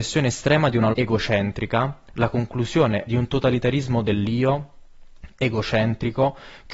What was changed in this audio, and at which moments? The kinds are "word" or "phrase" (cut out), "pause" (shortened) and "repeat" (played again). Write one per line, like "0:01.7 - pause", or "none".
0:00.9 - word
0:03.1 - word